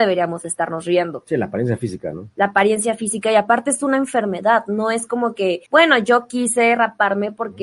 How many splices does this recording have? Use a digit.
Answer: 1